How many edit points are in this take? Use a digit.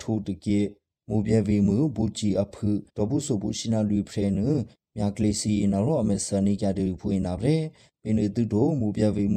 1